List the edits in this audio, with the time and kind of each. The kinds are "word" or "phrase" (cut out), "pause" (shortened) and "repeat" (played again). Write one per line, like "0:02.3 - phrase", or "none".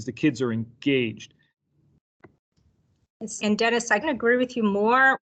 0:03.4 - phrase
0:04.0 - word